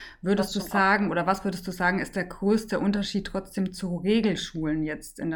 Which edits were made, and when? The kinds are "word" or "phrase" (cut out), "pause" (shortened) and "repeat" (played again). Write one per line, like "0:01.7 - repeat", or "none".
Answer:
none